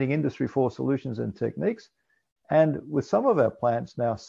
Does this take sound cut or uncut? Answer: uncut